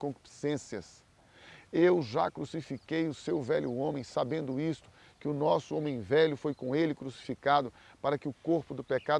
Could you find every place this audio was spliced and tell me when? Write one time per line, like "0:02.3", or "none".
none

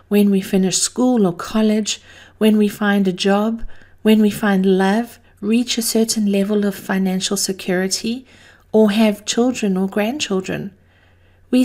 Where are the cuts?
none

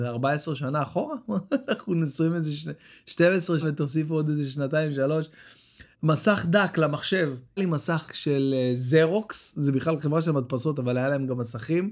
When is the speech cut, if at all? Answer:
0:03.6
0:05.9
0:07.6
0:08.1

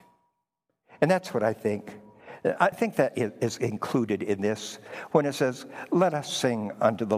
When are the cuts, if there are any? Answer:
0:02.7

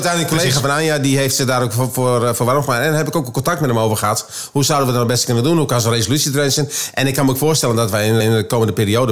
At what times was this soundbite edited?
0:08.2

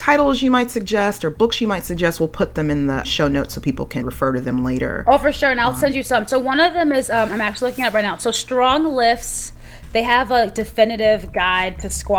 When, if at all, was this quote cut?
0:03.0
0:04.0

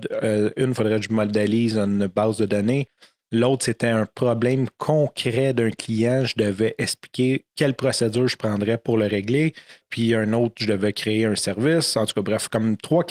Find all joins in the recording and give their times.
0:07.5

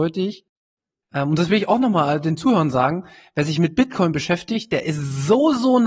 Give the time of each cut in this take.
none

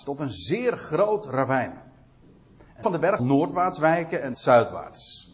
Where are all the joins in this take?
0:02.8
0:03.2
0:04.3

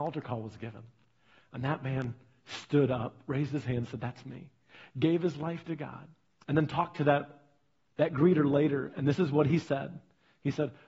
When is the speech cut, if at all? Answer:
none

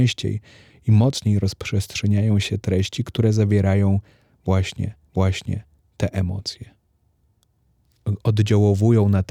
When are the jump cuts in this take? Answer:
0:05.1

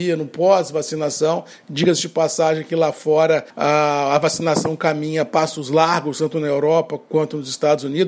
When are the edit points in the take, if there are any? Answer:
0:03.5

